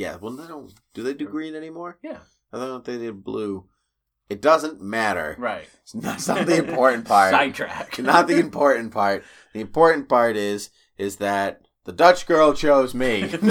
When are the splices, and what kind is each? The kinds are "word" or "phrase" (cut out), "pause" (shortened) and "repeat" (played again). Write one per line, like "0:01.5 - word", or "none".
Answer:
none